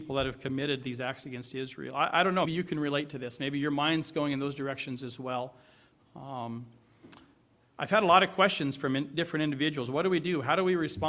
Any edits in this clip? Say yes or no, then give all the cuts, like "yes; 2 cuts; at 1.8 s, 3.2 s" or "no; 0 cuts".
yes; 1 cut; at 2.5 s